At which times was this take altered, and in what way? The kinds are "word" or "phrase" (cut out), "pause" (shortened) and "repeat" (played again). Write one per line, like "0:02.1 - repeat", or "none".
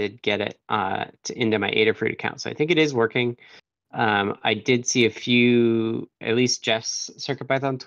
0:06.2 - word